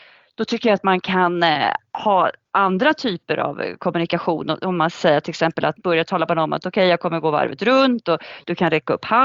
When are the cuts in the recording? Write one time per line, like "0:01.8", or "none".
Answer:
0:05.8